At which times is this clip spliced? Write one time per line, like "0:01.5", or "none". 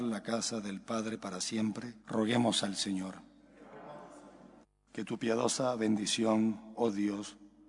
0:02.0
0:04.6

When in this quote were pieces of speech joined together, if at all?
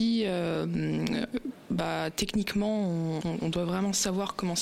none

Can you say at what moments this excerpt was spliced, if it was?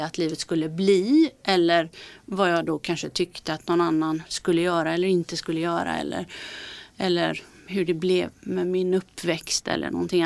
0:08.3

